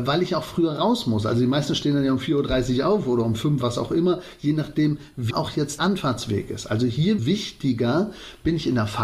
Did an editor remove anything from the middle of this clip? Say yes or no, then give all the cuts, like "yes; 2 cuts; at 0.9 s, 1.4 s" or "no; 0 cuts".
yes; 4 cuts; at 3.6 s, 5.3 s, 5.8 s, 7.2 s